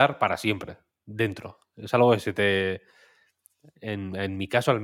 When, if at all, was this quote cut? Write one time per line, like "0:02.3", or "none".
none